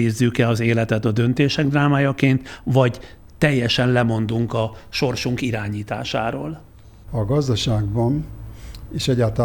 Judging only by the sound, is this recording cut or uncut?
uncut